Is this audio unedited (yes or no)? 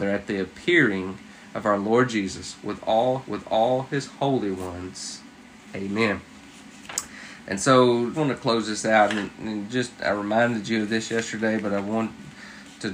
no